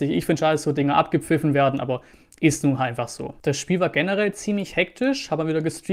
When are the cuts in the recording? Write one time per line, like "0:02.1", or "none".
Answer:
none